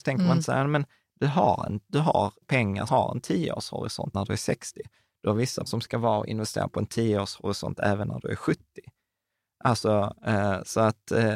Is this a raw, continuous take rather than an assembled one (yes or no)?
no